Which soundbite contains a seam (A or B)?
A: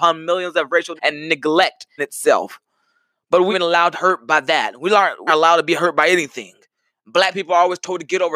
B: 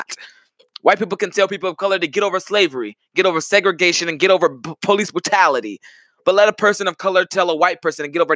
A